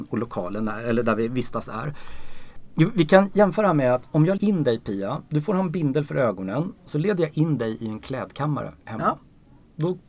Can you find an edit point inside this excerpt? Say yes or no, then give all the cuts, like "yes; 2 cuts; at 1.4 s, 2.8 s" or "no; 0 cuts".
yes; 3 cuts; at 4.4 s, 6.8 s, 8.8 s